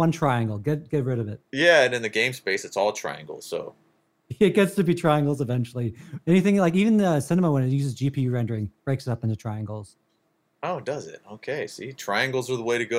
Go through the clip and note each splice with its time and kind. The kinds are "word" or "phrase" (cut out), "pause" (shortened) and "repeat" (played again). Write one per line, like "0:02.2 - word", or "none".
0:01.4 - pause